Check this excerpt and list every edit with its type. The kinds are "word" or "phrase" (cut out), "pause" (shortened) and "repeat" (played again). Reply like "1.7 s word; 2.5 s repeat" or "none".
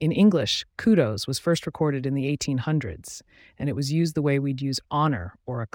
none